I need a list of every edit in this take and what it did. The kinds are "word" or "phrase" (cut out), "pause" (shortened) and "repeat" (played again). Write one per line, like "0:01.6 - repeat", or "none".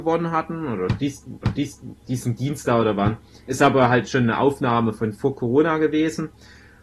0:01.4 - repeat